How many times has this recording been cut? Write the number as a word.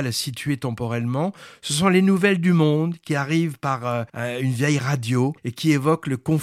two